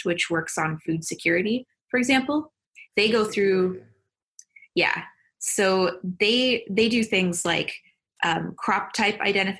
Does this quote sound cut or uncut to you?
uncut